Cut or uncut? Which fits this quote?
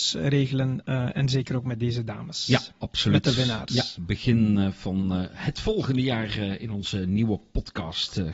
uncut